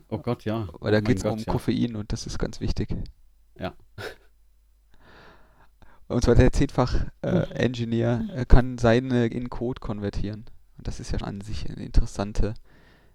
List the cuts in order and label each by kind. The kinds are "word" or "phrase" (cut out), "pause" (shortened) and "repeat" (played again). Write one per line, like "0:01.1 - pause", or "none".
0:01.2 - word
0:09.3 - word
0:11.2 - word